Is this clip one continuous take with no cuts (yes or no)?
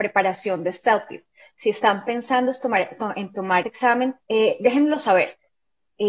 no